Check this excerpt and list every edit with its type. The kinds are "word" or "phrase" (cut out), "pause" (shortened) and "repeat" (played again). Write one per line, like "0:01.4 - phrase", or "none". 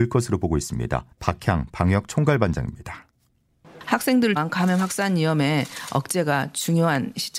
0:01.1 - pause
0:04.4 - word